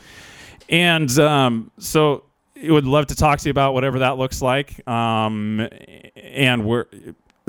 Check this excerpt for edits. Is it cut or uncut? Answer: uncut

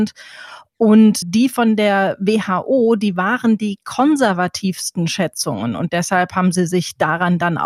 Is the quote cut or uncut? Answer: cut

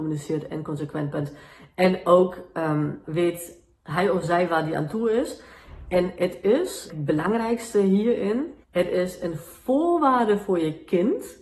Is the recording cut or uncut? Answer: cut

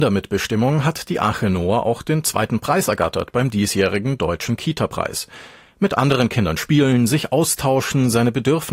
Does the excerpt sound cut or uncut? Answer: uncut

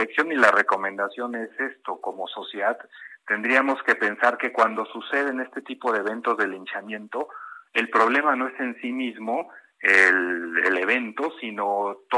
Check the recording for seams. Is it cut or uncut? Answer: uncut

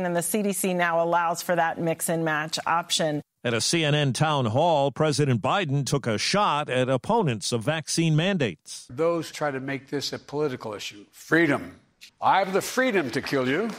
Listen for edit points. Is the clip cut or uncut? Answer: cut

